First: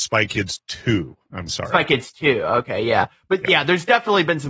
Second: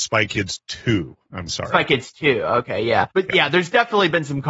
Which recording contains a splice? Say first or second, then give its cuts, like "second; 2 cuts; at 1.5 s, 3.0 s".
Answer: second; 1 cut; at 3.1 s